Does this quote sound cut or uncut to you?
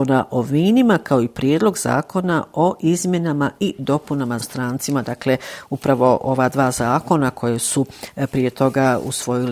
cut